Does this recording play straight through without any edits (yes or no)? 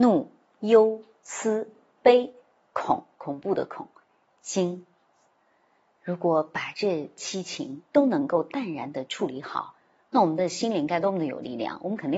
yes